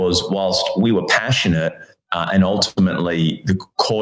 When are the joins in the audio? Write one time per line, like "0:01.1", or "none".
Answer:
none

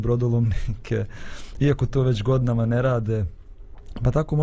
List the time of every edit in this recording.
none

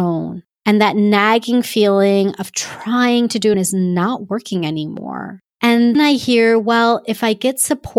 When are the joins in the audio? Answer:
0:03.5
0:05.9

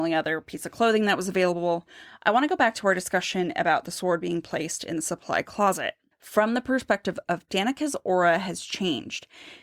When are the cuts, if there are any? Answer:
0:06.1
0:07.5

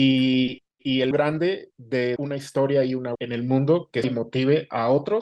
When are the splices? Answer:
0:01.1
0:02.2
0:03.1
0:04.0

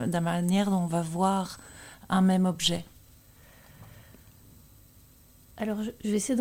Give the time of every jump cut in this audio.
none

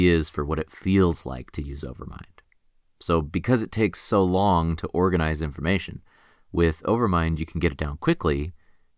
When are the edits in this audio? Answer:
none

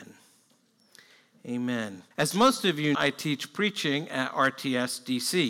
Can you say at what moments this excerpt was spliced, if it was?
0:02.1
0:02.9

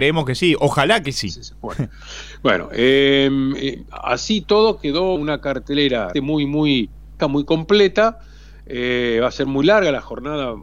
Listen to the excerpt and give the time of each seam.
0:05.2
0:06.1
0:07.2

